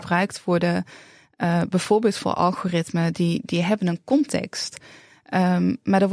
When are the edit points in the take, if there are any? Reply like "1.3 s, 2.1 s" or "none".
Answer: none